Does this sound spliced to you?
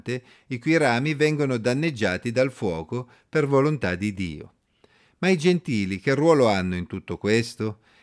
no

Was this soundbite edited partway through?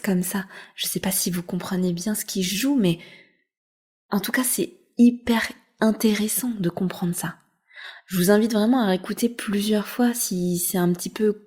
no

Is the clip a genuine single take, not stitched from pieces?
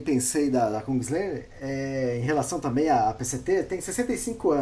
yes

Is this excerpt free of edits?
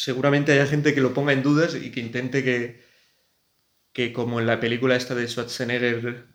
yes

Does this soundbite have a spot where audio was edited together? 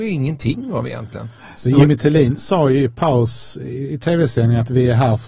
no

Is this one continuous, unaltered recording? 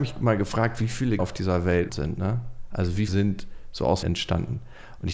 no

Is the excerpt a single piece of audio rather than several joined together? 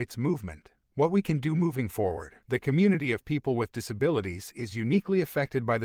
no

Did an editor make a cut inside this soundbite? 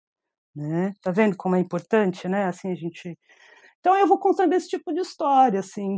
no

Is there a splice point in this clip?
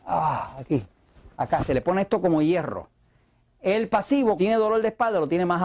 yes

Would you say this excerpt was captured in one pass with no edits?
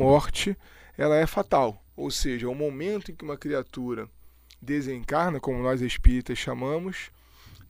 no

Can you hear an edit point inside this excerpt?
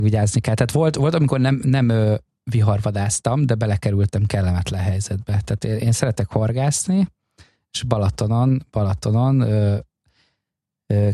no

